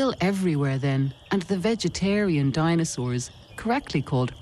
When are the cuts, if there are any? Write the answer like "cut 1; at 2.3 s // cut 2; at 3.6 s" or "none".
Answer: cut 1; at 1.2 s